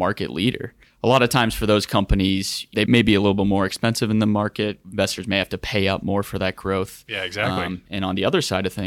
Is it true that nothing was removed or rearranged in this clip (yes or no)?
yes